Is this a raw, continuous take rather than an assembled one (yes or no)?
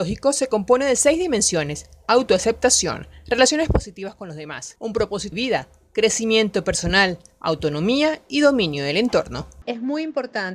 no